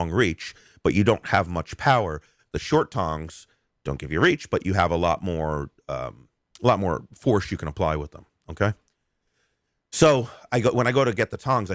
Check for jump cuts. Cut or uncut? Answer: uncut